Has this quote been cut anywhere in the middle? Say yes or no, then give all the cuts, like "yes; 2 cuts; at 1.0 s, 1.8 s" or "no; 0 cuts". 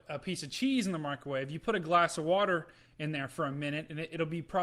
no; 0 cuts